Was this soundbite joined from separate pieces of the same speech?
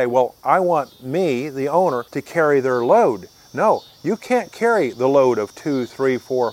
yes; 1 cut; at 2.1 s

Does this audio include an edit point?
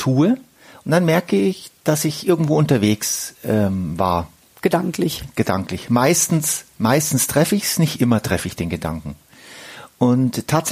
no; 0 cuts

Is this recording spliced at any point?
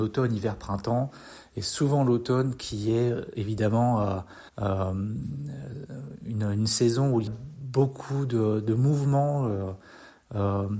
yes; 3 cuts; at 3.3 s, 4.5 s, 7.3 s

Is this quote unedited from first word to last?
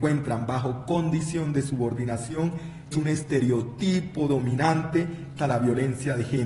no; 2 cuts; at 2.9 s, 5.4 s

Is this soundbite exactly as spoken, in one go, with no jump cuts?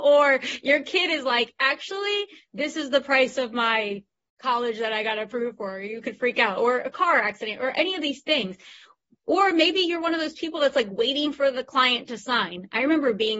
yes; 0 cuts

